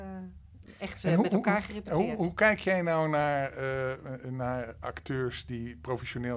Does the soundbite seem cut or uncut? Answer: uncut